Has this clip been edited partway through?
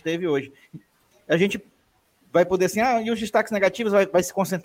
no; 0 cuts

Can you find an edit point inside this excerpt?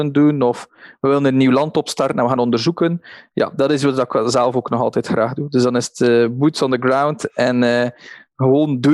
yes; 1 cut; at 2.4 s

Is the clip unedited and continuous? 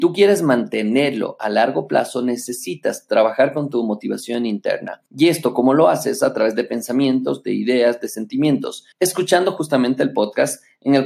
no; 2 cuts; at 5.1 s, 8.9 s

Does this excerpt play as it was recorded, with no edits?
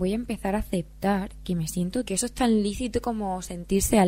no; 1 cut; at 2.1 s

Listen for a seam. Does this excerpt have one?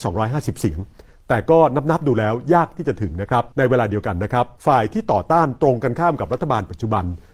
yes; 2 cuts; at 3.5 s, 4.6 s

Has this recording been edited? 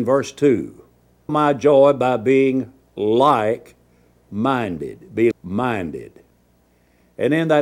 yes; 2 cuts; at 1.3 s, 5.3 s

